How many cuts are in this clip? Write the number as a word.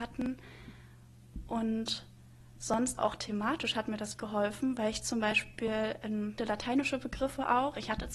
three